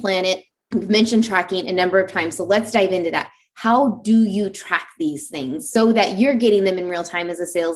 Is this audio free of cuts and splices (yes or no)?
yes